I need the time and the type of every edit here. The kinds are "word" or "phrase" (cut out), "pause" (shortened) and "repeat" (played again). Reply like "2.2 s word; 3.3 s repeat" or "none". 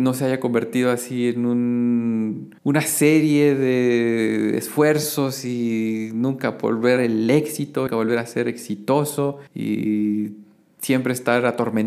2.6 s pause; 7.0 s phrase; 7.9 s phrase; 9.5 s pause